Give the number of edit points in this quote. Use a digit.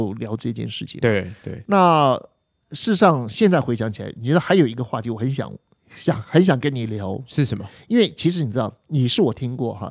0